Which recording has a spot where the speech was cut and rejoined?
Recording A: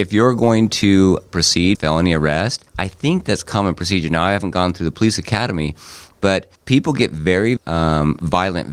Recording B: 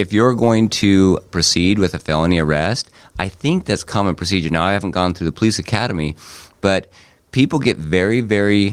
A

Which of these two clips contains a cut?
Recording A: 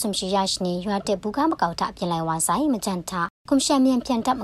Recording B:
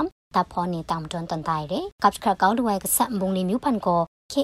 B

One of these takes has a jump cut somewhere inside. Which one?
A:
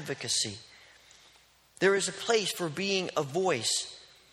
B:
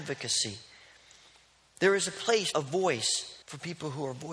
B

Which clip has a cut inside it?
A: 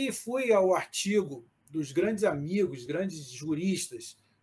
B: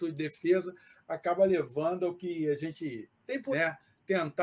B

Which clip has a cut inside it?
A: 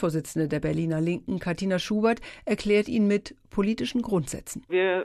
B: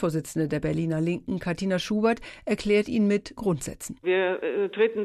B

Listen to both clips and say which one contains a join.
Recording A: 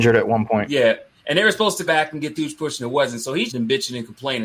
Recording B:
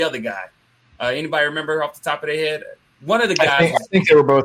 A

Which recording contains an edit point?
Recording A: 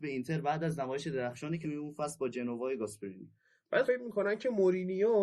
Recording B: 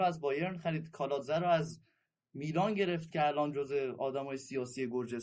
A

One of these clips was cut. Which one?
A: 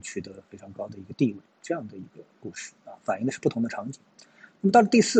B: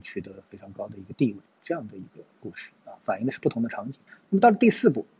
B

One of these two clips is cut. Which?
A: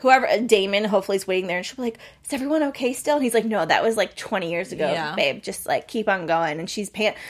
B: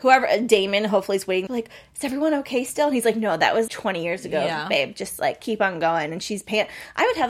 B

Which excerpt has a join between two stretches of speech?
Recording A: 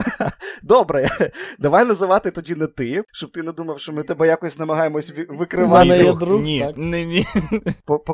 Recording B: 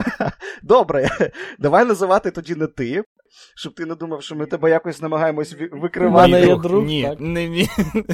A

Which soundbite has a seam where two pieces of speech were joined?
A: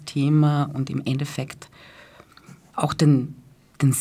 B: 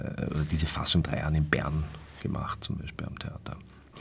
B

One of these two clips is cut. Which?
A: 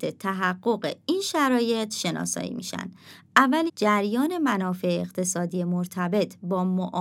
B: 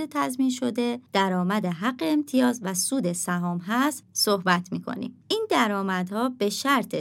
A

